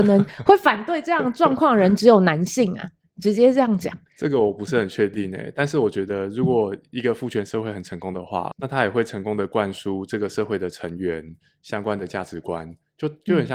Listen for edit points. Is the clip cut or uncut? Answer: cut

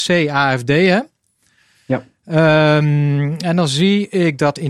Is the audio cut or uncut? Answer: uncut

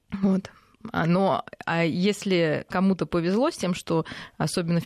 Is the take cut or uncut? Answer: uncut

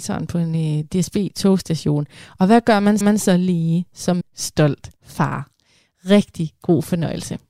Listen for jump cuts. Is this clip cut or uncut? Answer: cut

